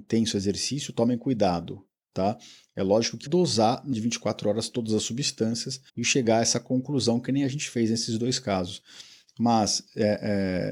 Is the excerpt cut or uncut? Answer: cut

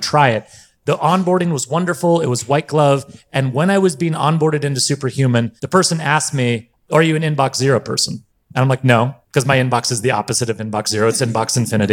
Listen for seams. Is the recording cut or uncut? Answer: cut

